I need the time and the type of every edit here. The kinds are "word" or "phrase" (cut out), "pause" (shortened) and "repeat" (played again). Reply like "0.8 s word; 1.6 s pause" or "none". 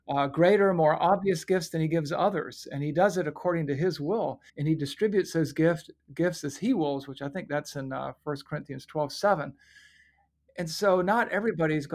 4.5 s pause